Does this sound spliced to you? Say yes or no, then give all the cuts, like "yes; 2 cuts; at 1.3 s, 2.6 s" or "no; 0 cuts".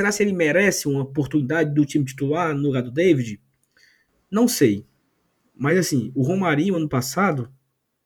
no; 0 cuts